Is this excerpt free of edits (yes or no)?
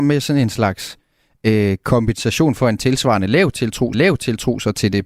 no